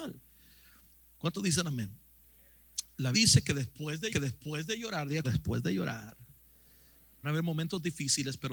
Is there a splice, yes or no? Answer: yes